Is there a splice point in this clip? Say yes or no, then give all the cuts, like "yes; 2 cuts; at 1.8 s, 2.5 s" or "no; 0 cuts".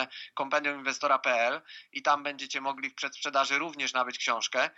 no; 0 cuts